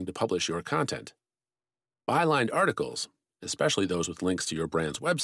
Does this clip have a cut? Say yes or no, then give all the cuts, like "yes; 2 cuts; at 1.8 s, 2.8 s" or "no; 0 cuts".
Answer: no; 0 cuts